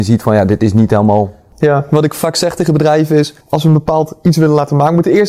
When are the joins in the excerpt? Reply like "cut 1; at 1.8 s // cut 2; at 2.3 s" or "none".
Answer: cut 1; at 3.4 s